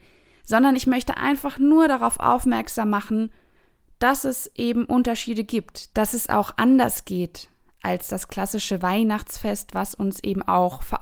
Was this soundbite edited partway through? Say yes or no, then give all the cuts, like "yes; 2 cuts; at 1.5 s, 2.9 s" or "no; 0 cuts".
no; 0 cuts